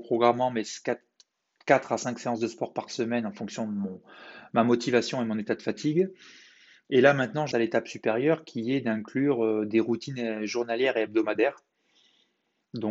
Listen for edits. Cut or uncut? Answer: cut